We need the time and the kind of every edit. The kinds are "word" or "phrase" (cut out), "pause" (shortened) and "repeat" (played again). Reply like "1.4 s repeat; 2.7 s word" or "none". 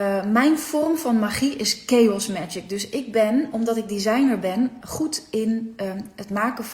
4.8 s word